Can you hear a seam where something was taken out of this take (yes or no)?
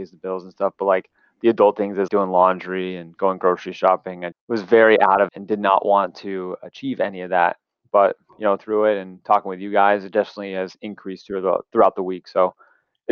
yes